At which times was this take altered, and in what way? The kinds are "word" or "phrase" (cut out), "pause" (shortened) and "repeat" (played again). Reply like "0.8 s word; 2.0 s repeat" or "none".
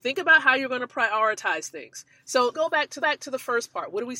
2.5 s word; 3.0 s repeat